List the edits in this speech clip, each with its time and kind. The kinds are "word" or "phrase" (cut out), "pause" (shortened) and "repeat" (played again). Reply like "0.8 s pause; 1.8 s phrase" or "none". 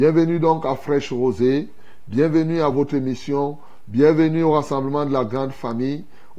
none